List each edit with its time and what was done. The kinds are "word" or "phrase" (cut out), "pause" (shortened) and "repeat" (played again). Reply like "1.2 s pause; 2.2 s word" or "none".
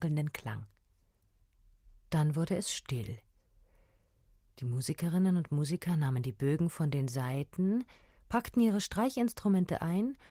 none

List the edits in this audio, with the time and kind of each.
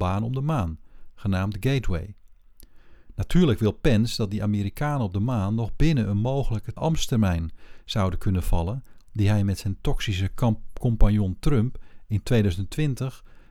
6.8 s word

